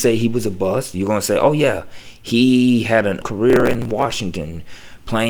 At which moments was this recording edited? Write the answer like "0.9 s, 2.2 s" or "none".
3.2 s